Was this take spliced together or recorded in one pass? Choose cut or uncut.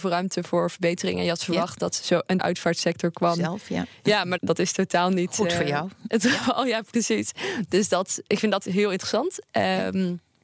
cut